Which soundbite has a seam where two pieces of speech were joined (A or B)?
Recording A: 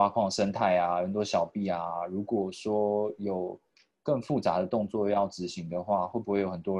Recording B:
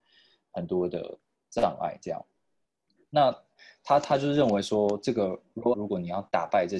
B